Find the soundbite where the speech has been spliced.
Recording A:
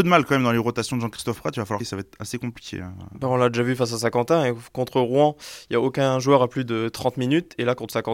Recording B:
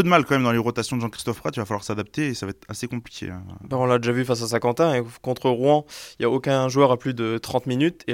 A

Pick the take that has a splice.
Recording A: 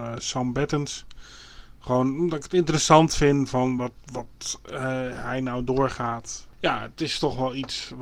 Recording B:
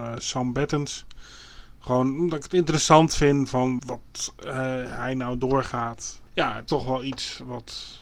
B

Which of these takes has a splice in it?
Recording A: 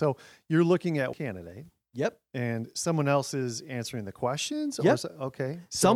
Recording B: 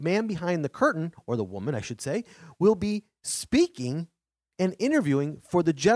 A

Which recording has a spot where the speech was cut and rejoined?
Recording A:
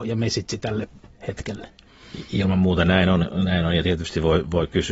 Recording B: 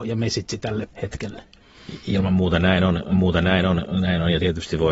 B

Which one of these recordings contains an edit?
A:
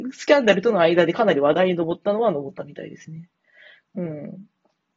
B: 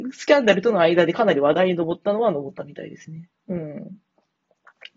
B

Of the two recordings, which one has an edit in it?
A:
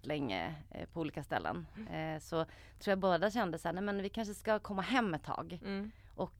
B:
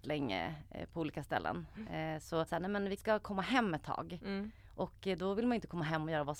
B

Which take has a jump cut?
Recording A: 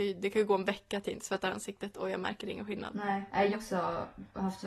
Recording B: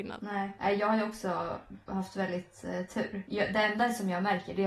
A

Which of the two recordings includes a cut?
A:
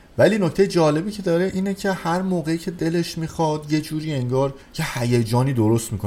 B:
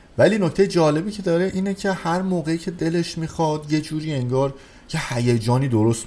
A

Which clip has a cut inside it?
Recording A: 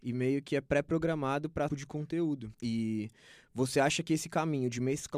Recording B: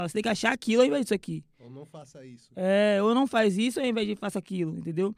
A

